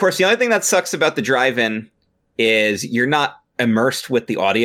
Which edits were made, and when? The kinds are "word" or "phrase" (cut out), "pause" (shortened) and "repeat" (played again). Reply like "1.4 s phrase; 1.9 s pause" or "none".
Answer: none